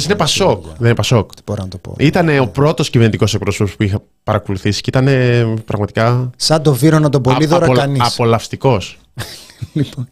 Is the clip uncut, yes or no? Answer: yes